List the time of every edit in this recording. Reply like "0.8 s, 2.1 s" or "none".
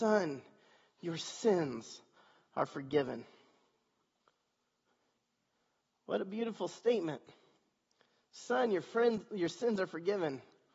none